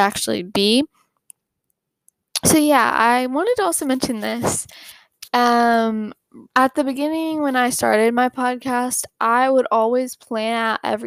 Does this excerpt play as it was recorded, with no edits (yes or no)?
no